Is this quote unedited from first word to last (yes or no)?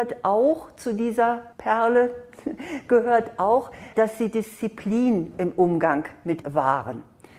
no